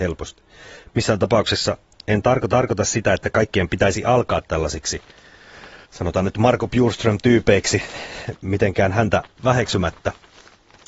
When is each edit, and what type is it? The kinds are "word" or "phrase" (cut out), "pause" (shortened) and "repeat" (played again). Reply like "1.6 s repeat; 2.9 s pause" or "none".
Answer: 2.5 s repeat; 5.8 s pause